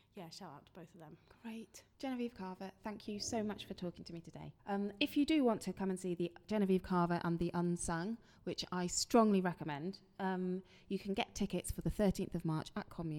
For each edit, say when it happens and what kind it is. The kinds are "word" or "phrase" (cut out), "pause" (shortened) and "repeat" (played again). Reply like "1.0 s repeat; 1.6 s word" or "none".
1.9 s pause; 4.6 s pause